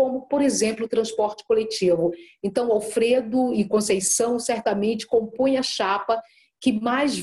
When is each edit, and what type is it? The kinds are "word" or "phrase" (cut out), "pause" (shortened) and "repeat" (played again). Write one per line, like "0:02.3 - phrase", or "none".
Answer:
none